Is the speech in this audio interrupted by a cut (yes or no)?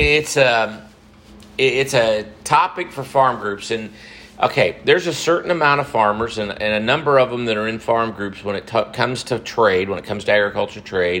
no